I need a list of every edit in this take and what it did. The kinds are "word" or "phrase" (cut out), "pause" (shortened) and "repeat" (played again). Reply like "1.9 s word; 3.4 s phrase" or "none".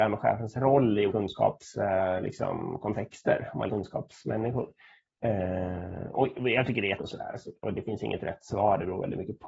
1.1 s word; 3.7 s word; 7.0 s word